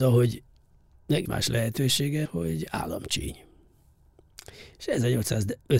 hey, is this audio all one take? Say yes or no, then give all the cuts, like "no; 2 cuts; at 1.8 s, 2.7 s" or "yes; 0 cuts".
no; 2 cuts; at 1.3 s, 2.3 s